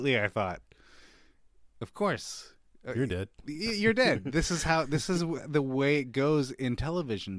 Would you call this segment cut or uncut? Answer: uncut